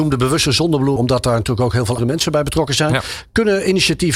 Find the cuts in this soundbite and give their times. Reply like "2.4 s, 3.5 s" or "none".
1.0 s, 2.0 s